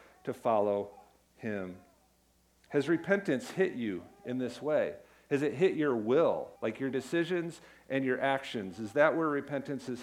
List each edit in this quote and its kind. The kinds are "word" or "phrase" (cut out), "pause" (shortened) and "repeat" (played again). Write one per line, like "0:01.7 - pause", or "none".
0:06.6 - pause